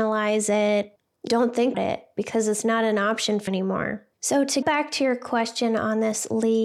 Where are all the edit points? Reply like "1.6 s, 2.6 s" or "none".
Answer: 1.3 s, 1.7 s, 3.5 s, 4.1 s, 4.6 s